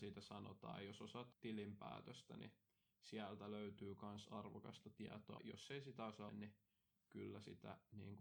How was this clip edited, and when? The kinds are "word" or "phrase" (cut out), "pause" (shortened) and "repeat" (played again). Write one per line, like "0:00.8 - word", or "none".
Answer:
0:01.3 - word
0:05.4 - word
0:06.3 - word